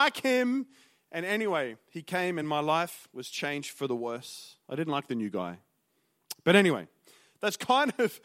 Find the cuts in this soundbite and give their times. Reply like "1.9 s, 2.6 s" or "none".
none